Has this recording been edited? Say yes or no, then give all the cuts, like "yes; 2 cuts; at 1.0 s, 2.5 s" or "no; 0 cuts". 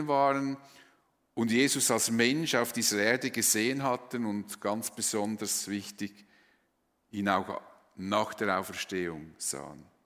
no; 0 cuts